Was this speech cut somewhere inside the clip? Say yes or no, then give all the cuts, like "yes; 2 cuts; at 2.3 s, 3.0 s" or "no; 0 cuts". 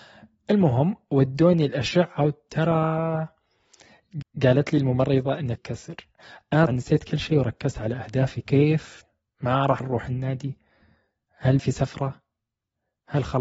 yes; 6 cuts; at 4.2 s, 5.6 s, 6.7 s, 8.4 s, 9.8 s, 11.6 s